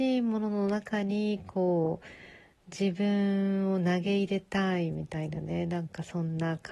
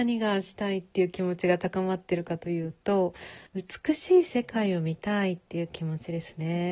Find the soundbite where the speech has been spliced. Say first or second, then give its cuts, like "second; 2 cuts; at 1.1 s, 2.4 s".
second; 1 cut; at 3.5 s